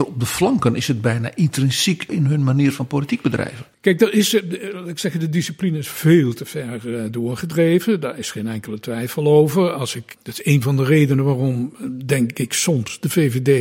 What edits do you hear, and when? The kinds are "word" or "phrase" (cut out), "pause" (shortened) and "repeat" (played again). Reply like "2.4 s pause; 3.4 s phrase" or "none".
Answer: 2.1 s word; 3.7 s pause; 10.1 s word

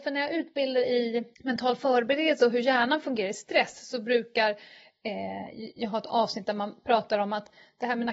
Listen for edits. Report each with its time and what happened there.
1.3 s pause

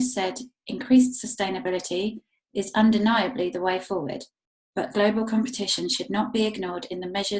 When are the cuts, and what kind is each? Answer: none

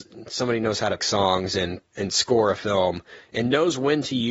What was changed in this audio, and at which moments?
1.0 s word; 1.9 s pause

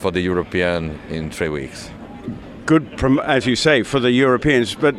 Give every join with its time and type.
none

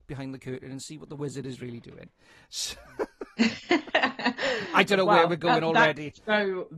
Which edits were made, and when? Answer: none

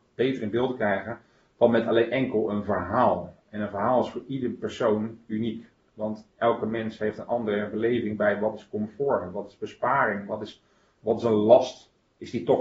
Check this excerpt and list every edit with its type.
none

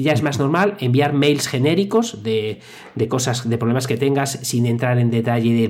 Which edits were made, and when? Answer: none

